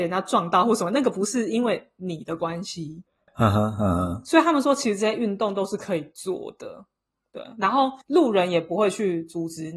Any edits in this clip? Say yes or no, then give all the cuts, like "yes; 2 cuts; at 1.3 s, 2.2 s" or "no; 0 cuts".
yes; 1 cut; at 8.0 s